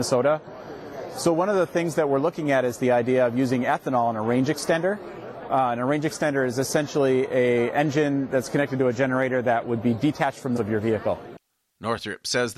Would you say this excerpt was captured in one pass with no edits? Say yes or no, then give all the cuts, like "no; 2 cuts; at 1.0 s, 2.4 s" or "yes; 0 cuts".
no; 1 cut; at 10.6 s